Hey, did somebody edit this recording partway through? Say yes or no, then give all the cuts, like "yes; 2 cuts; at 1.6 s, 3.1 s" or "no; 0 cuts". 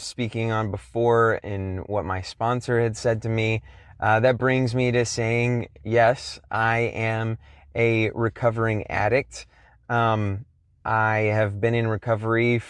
no; 0 cuts